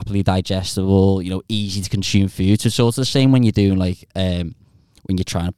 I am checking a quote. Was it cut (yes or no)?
no